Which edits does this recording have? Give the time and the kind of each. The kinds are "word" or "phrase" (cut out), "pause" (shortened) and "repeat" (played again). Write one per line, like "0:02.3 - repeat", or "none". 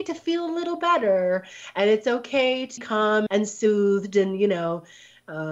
0:02.8 - word
0:03.3 - word